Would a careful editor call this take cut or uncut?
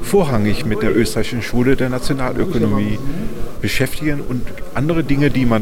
uncut